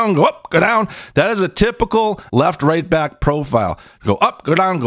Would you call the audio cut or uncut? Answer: cut